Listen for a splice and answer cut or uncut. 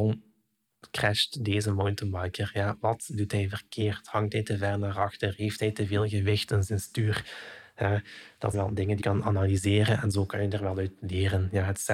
cut